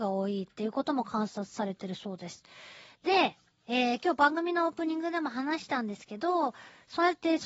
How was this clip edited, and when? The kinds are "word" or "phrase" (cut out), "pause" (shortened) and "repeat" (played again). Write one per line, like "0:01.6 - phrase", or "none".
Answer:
0:03.5 - pause